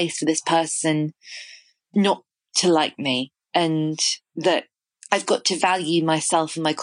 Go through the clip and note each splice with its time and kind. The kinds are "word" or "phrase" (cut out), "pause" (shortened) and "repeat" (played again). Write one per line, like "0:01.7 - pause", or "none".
none